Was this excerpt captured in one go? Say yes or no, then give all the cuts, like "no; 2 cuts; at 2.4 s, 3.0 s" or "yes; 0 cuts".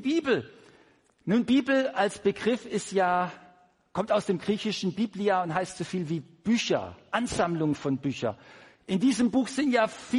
yes; 0 cuts